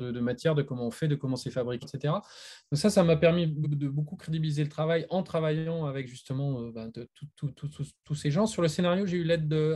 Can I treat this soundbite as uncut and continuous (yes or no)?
no